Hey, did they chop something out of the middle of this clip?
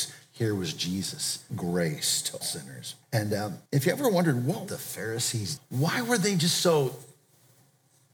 yes; 6 cuts; at 1.5 s, 2.4 s, 3.0 s, 3.7 s, 4.7 s, 5.6 s

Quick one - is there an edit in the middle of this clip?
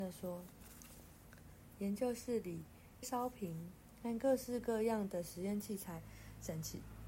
yes; 1 cut; at 3.0 s

